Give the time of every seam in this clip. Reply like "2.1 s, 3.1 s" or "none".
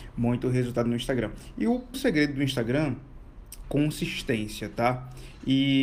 1.9 s, 3.6 s